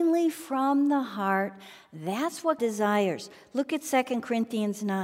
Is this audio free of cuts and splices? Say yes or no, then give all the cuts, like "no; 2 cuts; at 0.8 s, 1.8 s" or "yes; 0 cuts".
no; 1 cut; at 2.6 s